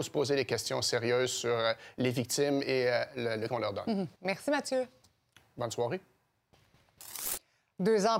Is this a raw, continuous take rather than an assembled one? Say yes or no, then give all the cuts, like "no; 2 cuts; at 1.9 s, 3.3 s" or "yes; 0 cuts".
no; 2 cuts; at 3.5 s, 4.1 s